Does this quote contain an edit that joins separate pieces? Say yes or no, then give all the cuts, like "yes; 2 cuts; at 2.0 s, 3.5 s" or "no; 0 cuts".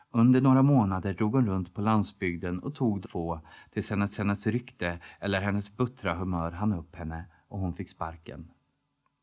yes; 2 cuts; at 3.0 s, 4.1 s